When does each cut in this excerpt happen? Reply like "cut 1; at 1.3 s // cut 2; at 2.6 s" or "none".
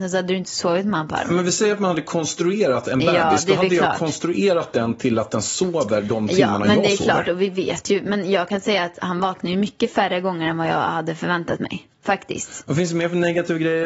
cut 1; at 11.9 s